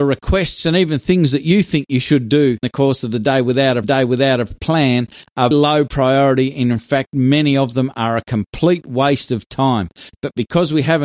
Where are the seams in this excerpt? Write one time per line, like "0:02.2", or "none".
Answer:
0:02.6
0:03.8
0:05.5